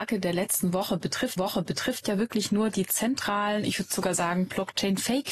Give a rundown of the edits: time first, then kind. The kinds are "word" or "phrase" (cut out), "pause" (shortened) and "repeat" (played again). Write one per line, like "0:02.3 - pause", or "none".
0:01.4 - repeat